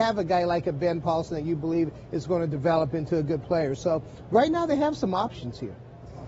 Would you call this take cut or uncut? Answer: uncut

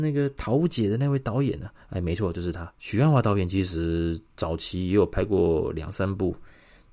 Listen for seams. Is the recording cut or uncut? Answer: cut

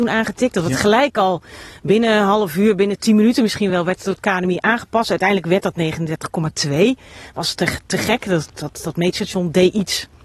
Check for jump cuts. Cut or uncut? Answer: uncut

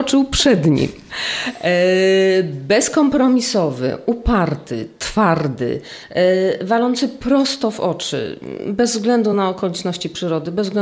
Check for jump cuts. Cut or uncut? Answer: uncut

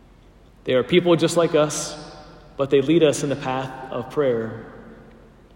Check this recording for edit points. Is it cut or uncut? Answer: uncut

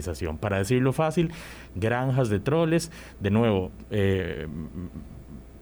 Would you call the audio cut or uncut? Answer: uncut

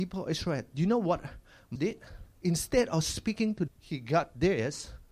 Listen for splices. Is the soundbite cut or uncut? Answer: cut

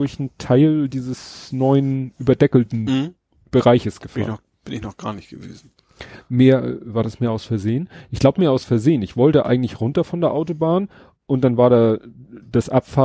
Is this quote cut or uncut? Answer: uncut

